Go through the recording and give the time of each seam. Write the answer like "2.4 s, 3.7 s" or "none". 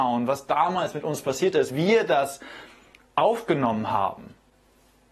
1.7 s